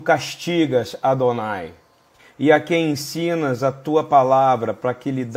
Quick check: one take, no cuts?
no; 1 cut; at 2.2 s

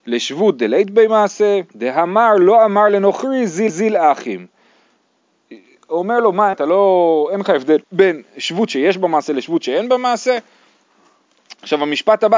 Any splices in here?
yes; 4 cuts; at 1.7 s, 3.7 s, 6.5 s, 7.8 s

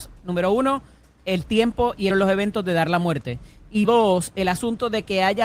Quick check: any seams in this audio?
yes; 2 cuts; at 2.1 s, 3.8 s

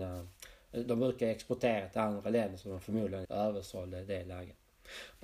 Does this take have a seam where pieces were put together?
yes; 1 cut; at 3.2 s

